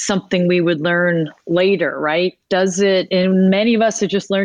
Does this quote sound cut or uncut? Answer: uncut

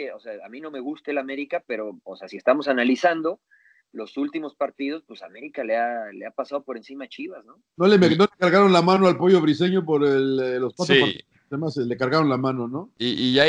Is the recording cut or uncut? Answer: uncut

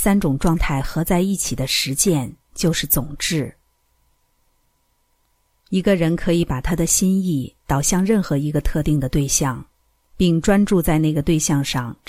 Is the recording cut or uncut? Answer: uncut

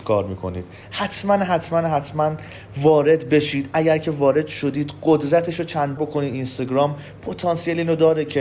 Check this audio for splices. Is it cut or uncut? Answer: cut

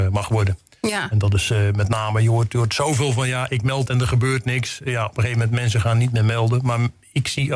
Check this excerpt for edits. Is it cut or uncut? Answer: cut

